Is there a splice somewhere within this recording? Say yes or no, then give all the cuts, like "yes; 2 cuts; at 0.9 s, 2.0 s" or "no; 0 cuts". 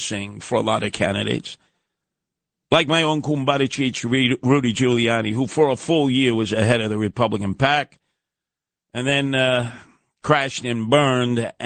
no; 0 cuts